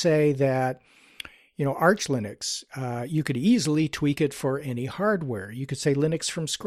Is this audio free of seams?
yes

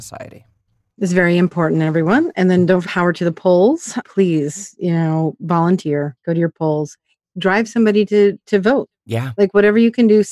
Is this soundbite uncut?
no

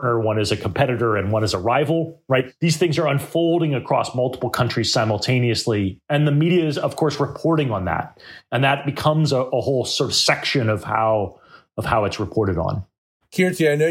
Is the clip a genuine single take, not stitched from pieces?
yes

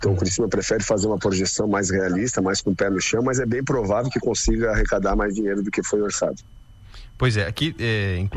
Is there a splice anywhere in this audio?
no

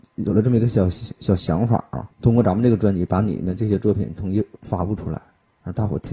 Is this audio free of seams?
no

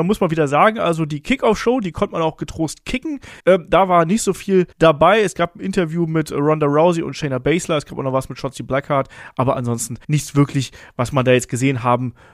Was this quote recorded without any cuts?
no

